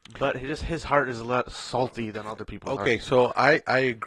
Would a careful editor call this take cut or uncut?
uncut